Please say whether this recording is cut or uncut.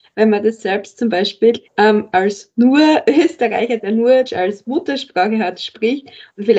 cut